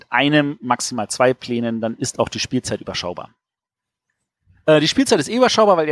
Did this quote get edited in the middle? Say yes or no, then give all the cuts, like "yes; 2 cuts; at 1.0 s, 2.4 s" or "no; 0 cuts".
no; 0 cuts